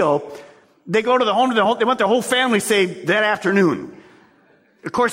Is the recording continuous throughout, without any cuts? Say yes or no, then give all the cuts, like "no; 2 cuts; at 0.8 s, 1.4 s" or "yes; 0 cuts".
yes; 0 cuts